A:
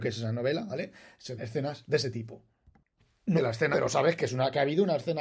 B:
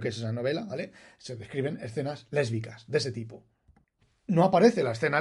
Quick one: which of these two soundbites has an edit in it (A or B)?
A